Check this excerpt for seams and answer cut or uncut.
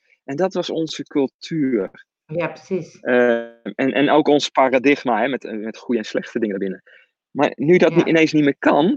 uncut